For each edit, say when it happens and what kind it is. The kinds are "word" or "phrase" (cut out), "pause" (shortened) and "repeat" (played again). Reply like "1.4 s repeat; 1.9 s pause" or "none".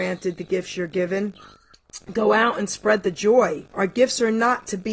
3.7 s pause